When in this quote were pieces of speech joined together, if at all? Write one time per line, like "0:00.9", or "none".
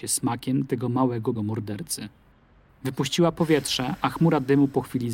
0:01.4